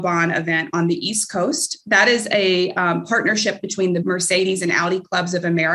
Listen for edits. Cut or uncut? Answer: cut